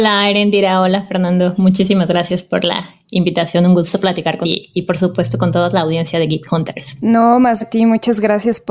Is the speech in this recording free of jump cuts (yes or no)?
no